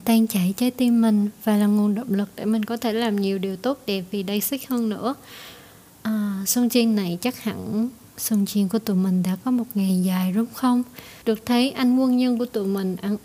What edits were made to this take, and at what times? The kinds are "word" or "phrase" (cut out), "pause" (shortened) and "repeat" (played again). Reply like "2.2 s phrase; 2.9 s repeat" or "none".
11.2 s pause